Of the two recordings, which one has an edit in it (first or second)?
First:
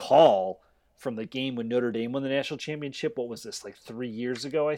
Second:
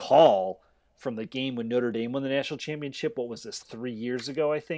second